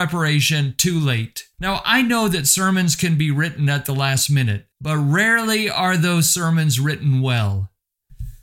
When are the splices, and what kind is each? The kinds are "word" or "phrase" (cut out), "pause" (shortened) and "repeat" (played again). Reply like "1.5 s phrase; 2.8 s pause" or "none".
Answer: 1.5 s pause; 4.7 s pause